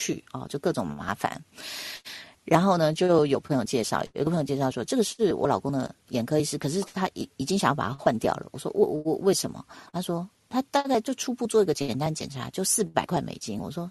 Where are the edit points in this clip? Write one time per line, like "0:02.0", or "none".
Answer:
0:06.0
0:09.9
0:10.7